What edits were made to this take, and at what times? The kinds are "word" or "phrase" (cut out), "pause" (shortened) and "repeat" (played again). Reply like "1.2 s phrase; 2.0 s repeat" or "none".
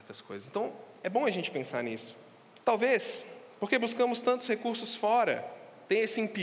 2.6 s pause